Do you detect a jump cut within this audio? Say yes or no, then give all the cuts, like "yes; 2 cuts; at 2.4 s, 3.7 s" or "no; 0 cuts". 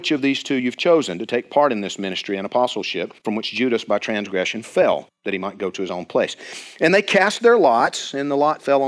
yes; 1 cut; at 3.2 s